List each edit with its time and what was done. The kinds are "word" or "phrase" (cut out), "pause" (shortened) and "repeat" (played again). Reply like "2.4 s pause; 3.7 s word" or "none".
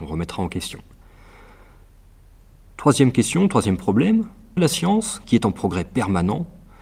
4.6 s word